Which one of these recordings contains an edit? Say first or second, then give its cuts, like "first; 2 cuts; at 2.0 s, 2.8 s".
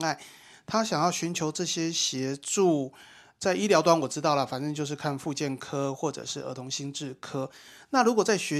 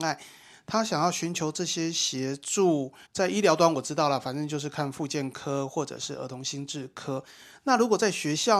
second; 1 cut; at 3.1 s